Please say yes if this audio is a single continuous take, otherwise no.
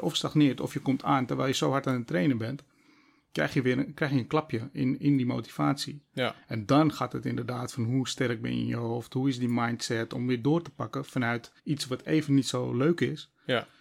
no